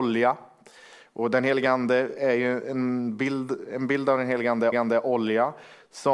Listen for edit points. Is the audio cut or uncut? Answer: cut